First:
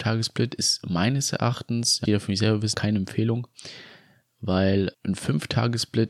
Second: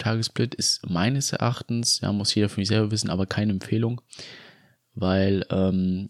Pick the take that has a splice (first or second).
first